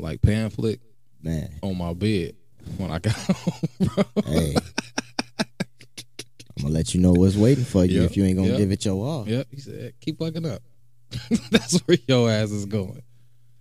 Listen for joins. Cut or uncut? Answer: uncut